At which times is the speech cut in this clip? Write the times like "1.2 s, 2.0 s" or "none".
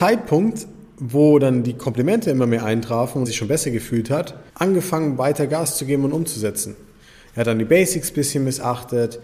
3.2 s, 4.5 s